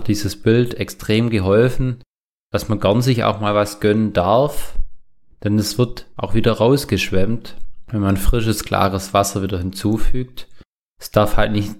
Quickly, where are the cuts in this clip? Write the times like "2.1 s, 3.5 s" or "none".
none